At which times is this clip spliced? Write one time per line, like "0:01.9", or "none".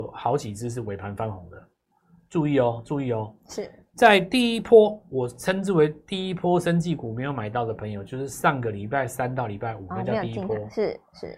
none